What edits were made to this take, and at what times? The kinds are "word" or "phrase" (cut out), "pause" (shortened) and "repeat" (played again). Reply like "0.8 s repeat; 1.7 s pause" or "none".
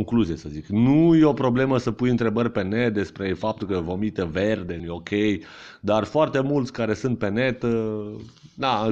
4.8 s phrase